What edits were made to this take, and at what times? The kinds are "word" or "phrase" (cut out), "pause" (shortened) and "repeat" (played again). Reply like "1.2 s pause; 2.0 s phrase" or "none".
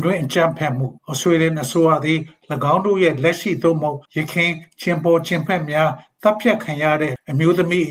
1.0 s pause; 4.0 s pause